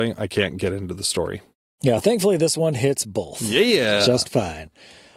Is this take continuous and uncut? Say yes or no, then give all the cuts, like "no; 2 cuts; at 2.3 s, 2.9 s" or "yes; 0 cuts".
yes; 0 cuts